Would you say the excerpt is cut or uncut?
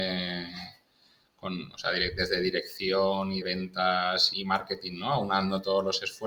cut